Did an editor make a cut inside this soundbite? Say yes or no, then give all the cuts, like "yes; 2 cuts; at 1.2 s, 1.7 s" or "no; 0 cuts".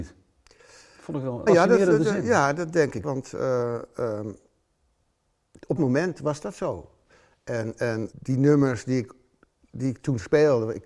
yes; 4 cuts; at 1.5 s, 3.0 s, 5.8 s, 8.1 s